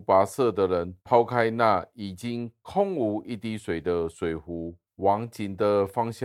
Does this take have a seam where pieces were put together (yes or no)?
yes